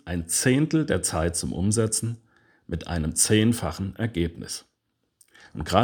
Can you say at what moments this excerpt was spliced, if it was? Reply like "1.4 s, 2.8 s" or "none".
none